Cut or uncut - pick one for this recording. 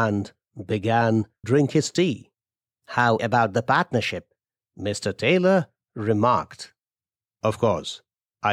cut